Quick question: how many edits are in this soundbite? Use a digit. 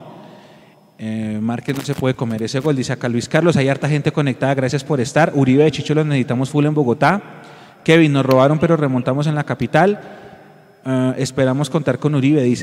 0